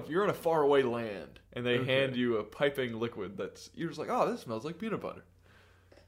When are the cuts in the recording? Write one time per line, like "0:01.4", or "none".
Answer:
0:01.5